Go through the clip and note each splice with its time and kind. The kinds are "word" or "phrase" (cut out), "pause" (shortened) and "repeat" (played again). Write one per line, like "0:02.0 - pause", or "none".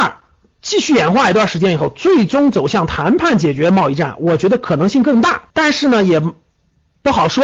0:05.5 - pause